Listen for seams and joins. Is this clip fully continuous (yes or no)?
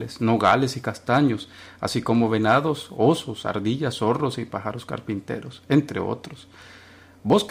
yes